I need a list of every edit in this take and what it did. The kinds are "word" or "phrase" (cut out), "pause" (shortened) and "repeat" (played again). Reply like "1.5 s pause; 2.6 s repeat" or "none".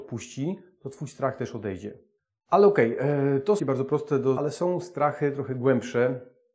2.2 s pause; 3.6 s phrase; 4.4 s word